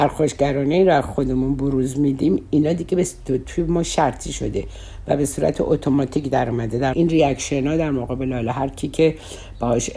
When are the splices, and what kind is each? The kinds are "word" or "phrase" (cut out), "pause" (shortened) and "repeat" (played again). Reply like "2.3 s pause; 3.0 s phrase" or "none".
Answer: 6.9 s phrase